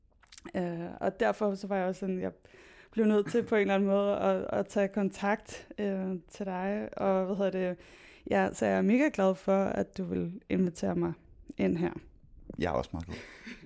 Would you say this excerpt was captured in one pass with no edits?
yes; 0 cuts

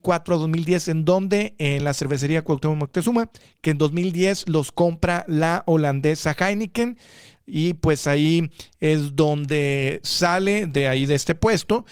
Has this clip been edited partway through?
no; 0 cuts

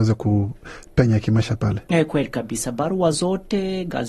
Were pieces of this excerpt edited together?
no; 0 cuts

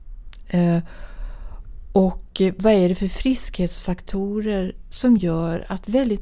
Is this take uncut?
yes; 0 cuts

